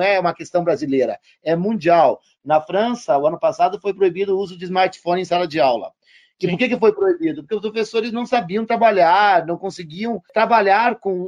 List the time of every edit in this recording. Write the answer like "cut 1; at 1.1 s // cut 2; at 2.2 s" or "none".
none